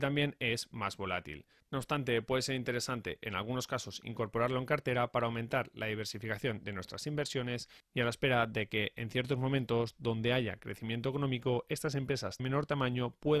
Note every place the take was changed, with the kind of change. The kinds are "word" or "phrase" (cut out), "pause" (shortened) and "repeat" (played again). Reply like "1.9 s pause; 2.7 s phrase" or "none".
12.4 s word